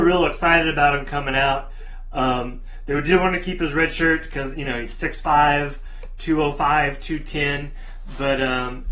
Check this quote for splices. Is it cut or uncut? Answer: uncut